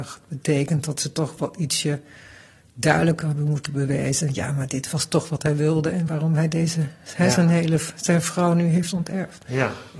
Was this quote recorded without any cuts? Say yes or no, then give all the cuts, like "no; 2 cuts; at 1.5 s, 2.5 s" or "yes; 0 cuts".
yes; 0 cuts